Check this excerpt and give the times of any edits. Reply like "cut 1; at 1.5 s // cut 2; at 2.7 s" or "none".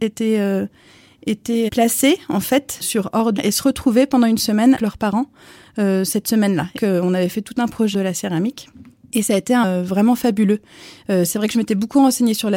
cut 1; at 1.7 s // cut 2; at 2.8 s // cut 3; at 3.4 s // cut 4; at 4.7 s // cut 5; at 6.8 s // cut 6; at 7.9 s // cut 7; at 9.6 s